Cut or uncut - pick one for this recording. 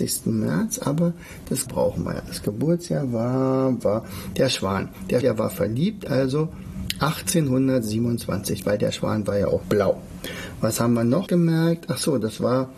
cut